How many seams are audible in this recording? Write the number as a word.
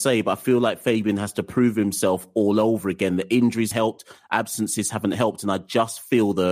one